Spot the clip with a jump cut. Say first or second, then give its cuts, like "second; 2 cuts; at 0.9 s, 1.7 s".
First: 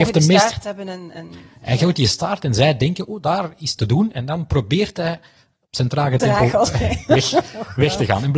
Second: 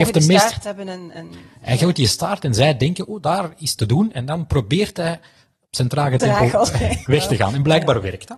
second; 1 cut; at 7.1 s